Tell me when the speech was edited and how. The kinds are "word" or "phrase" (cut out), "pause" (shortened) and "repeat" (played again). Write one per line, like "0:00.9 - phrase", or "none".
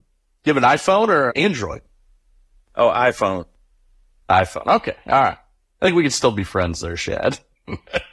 0:01.3 - word